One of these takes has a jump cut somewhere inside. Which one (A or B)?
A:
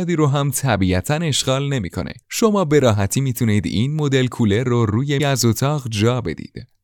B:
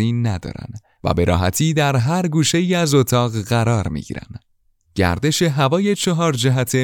A